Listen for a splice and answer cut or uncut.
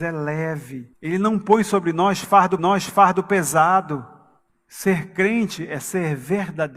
cut